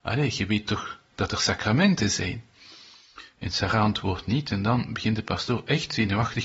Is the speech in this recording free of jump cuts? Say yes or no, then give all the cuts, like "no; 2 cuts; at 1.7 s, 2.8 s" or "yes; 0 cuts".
yes; 0 cuts